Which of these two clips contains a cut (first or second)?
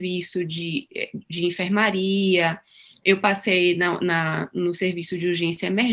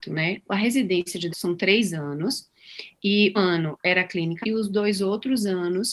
second